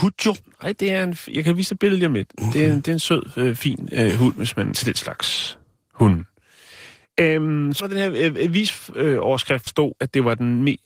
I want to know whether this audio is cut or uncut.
cut